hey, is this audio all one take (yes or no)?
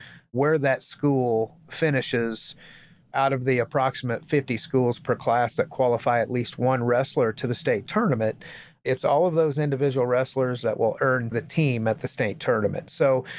no